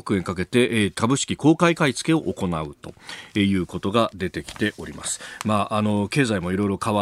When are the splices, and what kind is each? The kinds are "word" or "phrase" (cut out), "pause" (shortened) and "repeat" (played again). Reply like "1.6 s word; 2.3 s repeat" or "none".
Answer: 0.9 s word